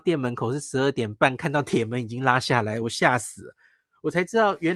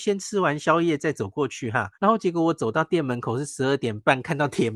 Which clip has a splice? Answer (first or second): second